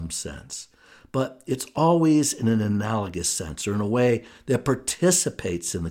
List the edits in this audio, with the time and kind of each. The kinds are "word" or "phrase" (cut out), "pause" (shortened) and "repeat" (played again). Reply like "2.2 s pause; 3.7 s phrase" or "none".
none